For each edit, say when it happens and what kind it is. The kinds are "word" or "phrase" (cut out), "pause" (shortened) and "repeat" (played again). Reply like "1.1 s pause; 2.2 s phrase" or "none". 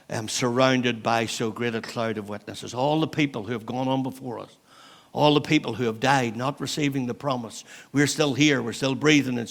none